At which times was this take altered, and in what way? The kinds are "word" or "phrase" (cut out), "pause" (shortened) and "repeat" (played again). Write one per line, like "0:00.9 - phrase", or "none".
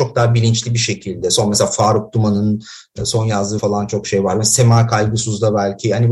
0:03.6 - word